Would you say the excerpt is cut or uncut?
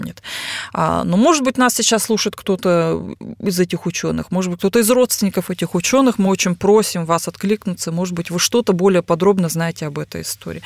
uncut